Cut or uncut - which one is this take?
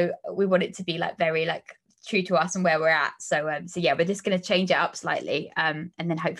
uncut